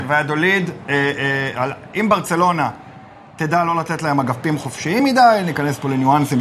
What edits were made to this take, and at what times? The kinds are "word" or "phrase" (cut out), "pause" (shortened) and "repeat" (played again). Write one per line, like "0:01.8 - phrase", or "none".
none